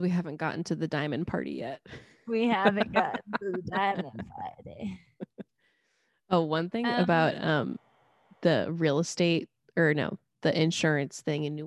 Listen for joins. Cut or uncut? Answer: cut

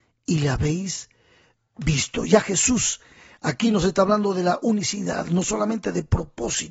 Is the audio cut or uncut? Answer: uncut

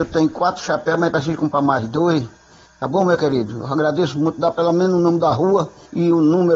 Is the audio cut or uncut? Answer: uncut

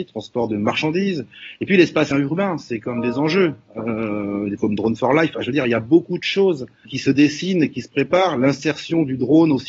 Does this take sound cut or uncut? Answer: cut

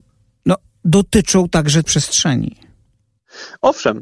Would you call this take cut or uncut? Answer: cut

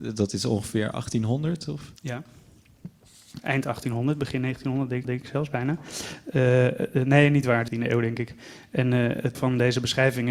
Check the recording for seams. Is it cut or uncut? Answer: cut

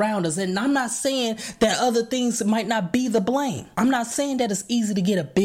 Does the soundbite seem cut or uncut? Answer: uncut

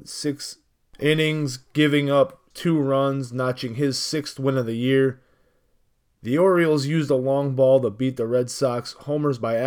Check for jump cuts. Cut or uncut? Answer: cut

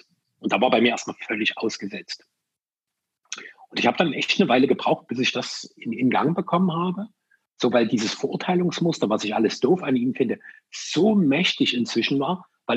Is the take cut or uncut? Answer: cut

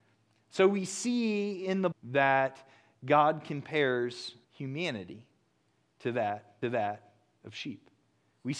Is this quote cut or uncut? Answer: cut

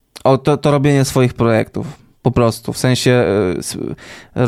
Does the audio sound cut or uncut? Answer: uncut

